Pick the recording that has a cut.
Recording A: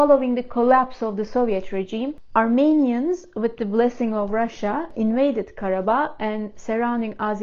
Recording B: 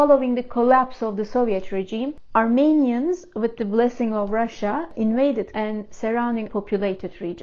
B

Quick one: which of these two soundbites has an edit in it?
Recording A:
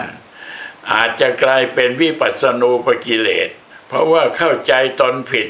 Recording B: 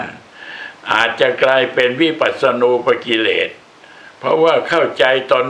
A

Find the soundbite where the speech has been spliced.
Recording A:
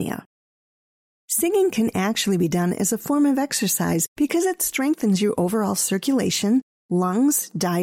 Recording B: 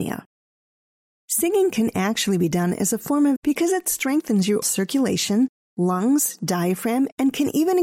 B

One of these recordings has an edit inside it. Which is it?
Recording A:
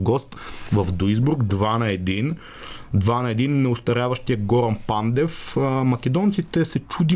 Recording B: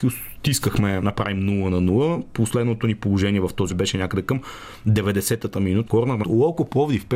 B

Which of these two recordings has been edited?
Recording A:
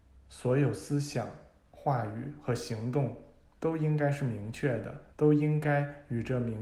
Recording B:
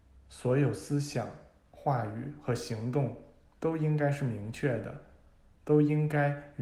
A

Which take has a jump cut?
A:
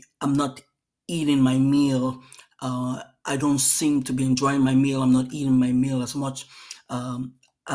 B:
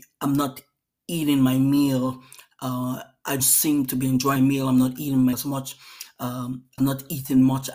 B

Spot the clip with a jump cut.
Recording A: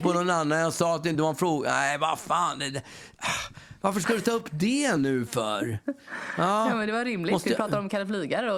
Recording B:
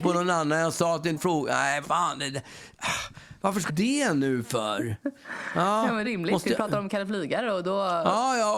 B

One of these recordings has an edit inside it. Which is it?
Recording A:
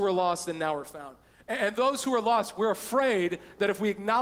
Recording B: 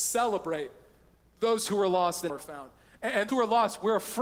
B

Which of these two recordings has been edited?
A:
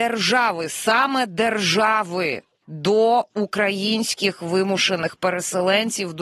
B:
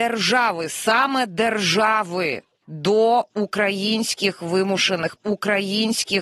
B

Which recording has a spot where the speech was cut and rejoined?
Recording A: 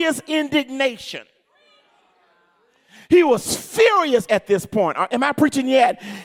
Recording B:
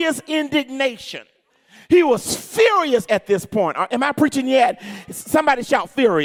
B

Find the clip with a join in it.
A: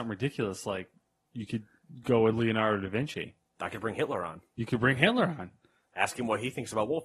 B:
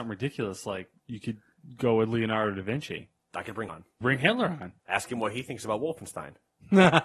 B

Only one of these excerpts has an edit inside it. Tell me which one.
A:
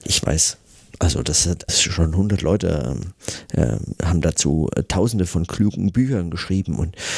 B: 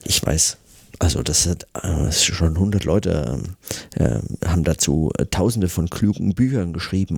A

